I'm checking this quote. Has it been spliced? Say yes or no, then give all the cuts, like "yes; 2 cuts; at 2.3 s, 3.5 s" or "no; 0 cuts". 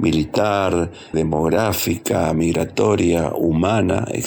yes; 1 cut; at 1.1 s